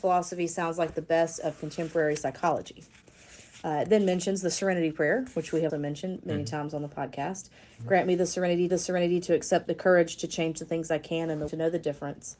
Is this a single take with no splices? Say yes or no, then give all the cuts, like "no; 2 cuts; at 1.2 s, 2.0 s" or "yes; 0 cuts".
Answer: no; 4 cuts; at 5.7 s, 8.7 s, 9.6 s, 11.5 s